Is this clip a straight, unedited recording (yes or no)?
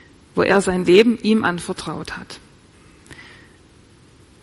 yes